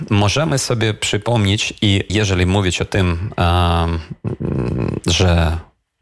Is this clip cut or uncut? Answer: cut